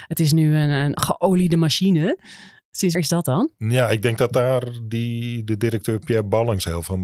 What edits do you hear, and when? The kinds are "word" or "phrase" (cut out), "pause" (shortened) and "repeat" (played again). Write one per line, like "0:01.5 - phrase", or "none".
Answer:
0:02.9 - word